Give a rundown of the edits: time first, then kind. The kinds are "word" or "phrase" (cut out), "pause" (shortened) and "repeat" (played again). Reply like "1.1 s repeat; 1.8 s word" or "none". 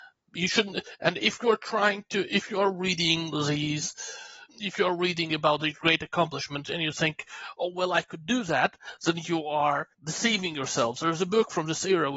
4.5 s pause; 9.9 s pause